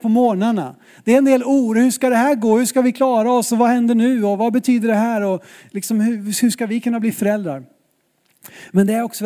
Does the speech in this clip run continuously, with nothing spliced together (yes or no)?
yes